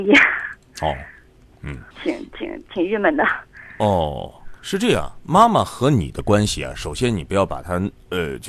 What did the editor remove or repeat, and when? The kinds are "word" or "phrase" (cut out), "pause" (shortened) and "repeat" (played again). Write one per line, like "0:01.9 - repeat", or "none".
0:01.9 - pause
0:04.6 - pause